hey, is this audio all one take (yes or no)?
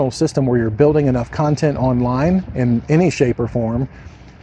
yes